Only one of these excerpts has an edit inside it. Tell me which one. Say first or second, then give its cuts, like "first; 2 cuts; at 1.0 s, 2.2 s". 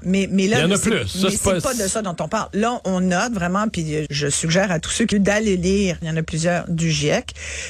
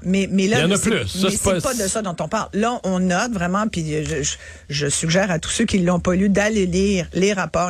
first; 3 cuts; at 4.1 s, 5.1 s, 6.0 s